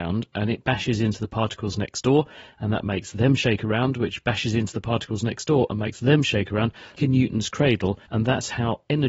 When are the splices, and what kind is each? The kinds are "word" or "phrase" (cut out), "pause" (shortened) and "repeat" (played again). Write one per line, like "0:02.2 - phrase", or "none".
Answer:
0:07.0 - word
0:08.0 - pause